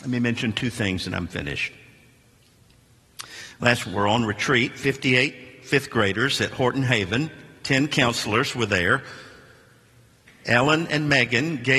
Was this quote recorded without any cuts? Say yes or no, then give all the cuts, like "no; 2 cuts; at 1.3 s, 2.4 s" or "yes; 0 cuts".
no; 1 cut; at 3.8 s